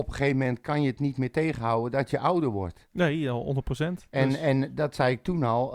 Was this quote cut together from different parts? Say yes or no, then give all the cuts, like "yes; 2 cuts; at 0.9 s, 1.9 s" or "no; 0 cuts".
no; 0 cuts